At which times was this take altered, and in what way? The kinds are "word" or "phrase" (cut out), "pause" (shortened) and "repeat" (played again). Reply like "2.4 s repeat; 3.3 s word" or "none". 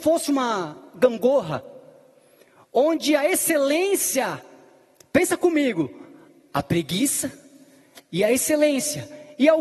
none